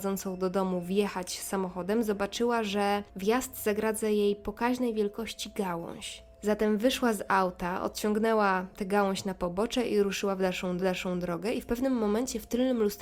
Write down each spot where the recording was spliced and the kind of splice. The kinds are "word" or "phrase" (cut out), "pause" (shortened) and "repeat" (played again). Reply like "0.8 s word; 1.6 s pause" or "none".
3.1 s pause; 6.3 s pause; 10.8 s repeat

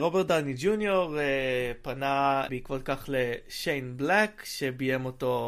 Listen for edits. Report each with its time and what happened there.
2.5 s word

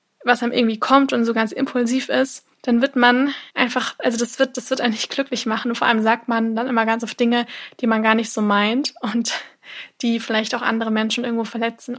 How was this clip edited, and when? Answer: 2.5 s pause; 3.5 s pause

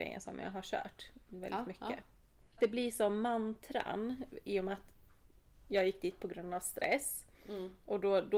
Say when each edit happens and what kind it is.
none

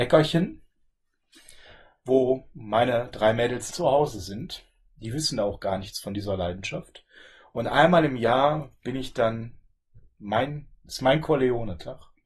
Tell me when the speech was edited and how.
3.7 s word

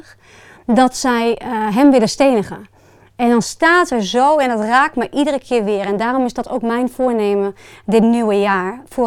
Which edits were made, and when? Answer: none

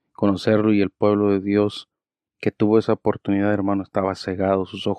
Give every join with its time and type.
none

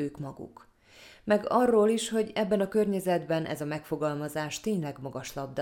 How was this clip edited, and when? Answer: none

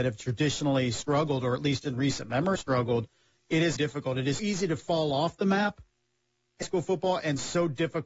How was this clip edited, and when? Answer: 2.6 s word; 3.8 s word; 4.4 s word; 6.6 s word

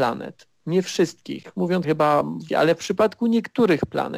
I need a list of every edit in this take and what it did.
1.8 s word; 2.5 s word

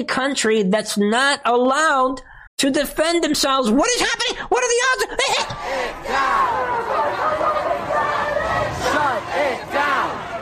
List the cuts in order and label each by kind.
2.5 s pause

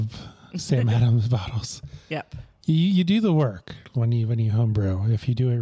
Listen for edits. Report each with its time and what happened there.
none

